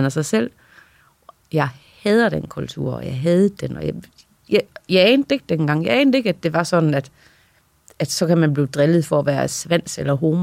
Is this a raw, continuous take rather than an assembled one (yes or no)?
yes